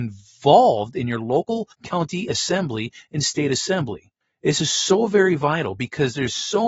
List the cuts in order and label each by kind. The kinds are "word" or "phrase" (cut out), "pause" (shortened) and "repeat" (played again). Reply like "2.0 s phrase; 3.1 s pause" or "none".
1.7 s pause; 4.2 s pause